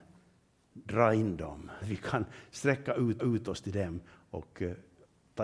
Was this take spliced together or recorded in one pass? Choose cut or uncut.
cut